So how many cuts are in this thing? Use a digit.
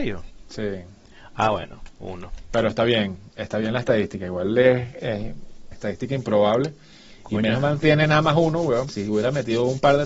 2